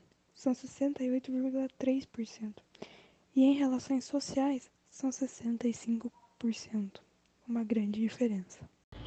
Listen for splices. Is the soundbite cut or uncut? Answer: uncut